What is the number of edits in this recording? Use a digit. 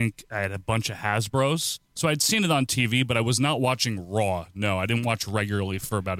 1